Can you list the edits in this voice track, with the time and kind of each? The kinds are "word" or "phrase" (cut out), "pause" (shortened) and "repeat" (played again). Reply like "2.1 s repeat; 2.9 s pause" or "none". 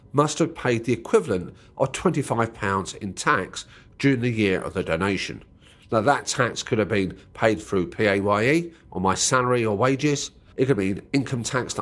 none